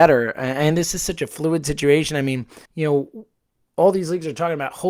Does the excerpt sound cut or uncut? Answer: cut